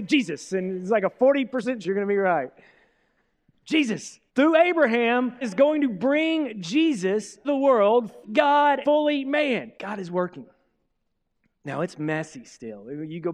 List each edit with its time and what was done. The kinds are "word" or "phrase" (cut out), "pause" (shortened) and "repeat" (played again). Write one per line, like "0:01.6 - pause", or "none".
0:01.8 - word
0:04.3 - pause
0:05.4 - word
0:07.4 - word
0:08.2 - word
0:08.8 - word
0:09.8 - pause